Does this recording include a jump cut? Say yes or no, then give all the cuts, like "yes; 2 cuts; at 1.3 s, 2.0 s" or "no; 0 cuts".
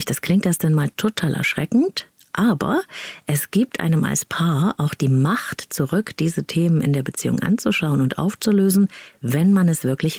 no; 0 cuts